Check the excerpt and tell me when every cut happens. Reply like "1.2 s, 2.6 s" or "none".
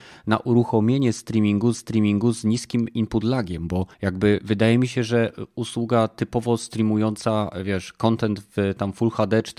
1.7 s, 3.9 s